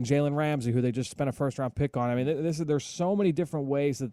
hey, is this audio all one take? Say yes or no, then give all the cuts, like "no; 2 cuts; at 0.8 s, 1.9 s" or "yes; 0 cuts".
yes; 0 cuts